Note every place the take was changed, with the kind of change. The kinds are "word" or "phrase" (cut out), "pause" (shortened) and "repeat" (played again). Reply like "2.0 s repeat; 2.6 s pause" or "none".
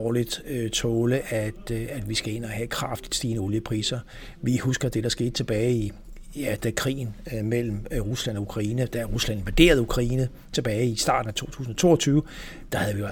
none